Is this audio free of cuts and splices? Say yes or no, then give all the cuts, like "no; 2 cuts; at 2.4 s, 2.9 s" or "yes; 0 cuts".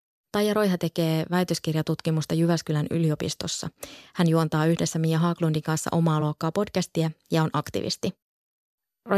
yes; 0 cuts